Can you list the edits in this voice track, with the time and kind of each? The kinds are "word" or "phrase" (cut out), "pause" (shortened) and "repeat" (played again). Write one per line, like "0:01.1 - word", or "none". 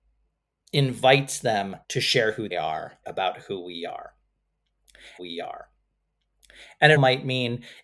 0:01.8 - pause
0:02.5 - word
0:03.0 - phrase
0:05.2 - repeat
0:07.0 - word